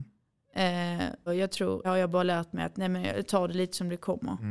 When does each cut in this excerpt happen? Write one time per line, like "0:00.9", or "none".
0:01.3
0:01.8